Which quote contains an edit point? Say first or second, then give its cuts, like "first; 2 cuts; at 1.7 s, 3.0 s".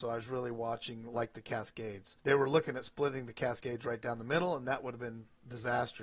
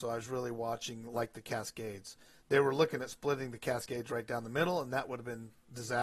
first; 1 cut; at 2.2 s